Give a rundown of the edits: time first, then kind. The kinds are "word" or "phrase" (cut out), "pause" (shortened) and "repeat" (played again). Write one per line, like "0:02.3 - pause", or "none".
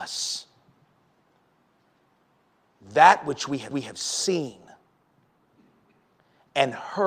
0:03.7 - repeat